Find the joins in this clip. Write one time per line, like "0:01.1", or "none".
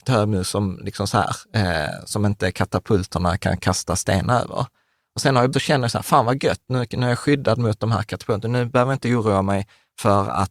0:05.5